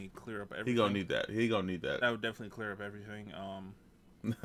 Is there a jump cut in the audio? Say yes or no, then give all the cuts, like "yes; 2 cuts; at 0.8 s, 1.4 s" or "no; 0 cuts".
no; 0 cuts